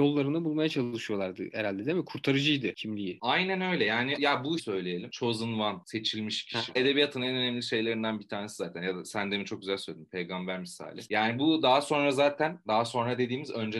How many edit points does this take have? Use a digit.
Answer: 3